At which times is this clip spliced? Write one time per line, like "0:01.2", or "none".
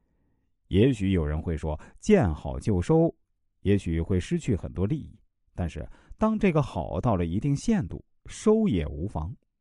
none

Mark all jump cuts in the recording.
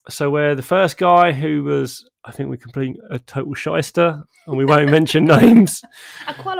none

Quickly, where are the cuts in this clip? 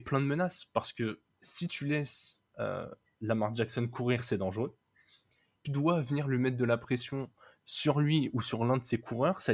0:01.3
0:05.7

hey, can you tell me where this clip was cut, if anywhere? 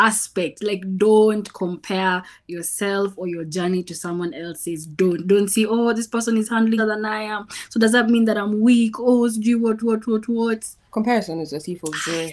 0:06.8
0:09.8
0:10.9

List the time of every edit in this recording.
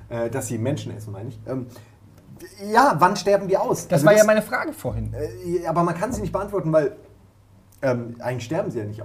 none

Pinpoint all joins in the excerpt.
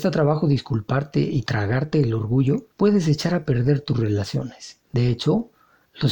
0:02.7
0:04.8

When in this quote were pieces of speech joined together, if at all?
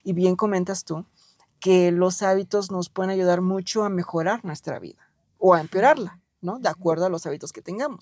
none

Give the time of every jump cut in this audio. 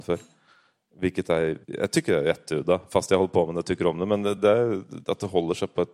0:01.6
0:04.4

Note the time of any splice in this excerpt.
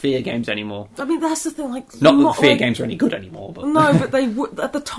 none

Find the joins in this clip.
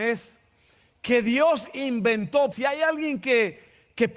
0:02.5

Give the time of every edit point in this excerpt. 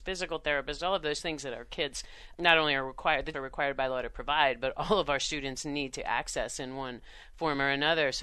0:02.3
0:03.3

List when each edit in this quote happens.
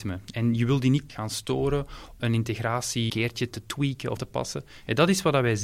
0:01.1
0:02.2
0:03.1
0:04.2

